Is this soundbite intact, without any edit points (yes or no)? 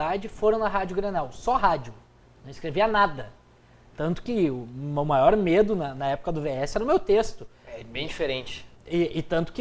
yes